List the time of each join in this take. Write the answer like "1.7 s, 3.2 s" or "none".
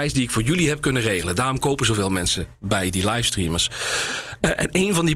none